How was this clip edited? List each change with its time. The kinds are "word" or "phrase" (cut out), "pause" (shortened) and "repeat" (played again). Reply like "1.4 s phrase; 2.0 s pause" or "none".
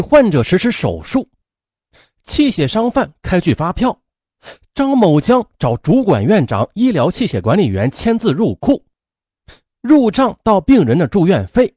none

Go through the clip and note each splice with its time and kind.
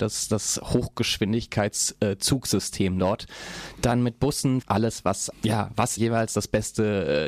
4.6 s word; 5.3 s word; 6.0 s word

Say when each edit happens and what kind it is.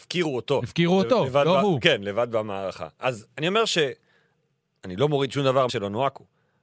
5.7 s word

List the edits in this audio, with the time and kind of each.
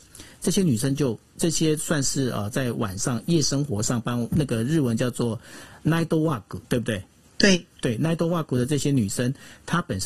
6.6 s pause; 7.2 s pause

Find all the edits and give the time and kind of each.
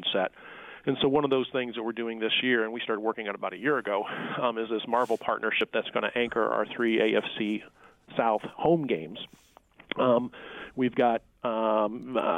none

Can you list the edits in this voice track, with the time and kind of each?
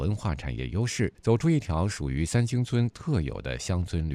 1.1 s pause

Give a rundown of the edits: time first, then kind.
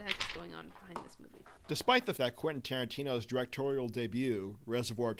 1.6 s pause; 2.2 s word

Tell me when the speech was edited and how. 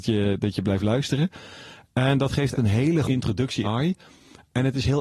2.6 s word; 3.0 s word; 3.6 s word

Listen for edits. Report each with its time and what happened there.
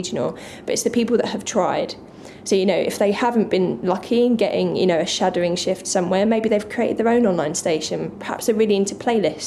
none

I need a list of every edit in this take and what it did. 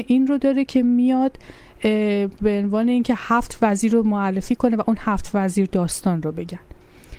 none

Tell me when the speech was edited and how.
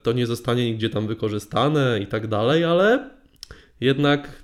none

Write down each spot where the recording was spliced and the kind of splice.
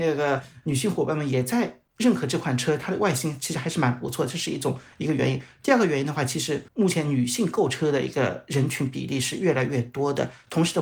6.7 s pause

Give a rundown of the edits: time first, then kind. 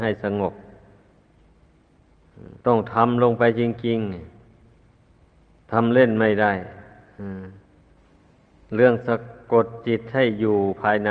2.6 s pause

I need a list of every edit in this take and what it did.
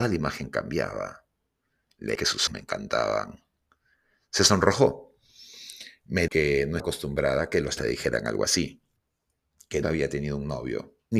2.1 s word; 2.5 s word; 6.3 s word; 6.8 s word; 7.8 s word; 9.8 s word

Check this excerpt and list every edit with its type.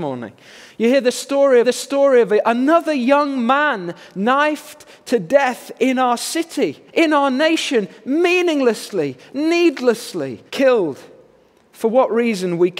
1.6 s repeat; 6.9 s pause; 10.5 s pause

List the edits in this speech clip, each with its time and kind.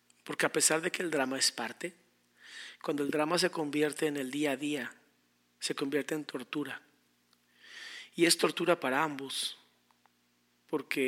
none

